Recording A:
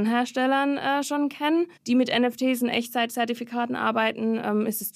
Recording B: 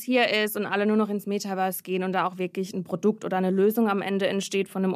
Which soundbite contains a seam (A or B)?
A